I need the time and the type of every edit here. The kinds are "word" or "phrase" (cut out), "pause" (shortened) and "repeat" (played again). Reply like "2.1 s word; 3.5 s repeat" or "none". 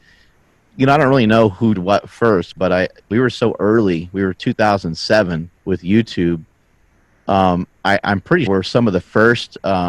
1.7 s word; 3.1 s phrase; 5.5 s pause; 8.5 s word

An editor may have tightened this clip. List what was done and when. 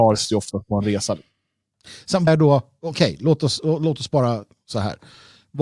2.3 s word

